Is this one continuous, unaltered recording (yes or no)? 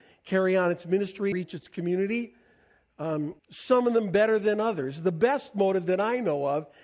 no